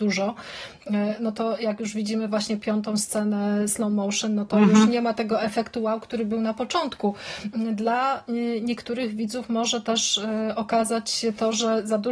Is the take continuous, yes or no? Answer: yes